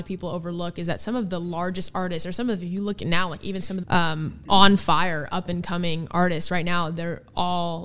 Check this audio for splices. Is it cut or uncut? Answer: cut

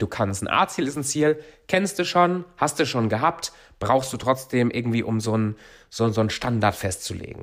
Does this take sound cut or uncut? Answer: uncut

